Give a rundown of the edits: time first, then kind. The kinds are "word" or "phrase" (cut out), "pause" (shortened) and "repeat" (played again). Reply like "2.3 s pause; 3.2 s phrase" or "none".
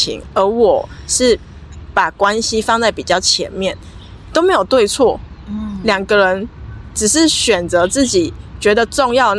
none

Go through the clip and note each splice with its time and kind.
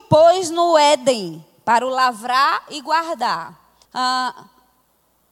3.9 s pause

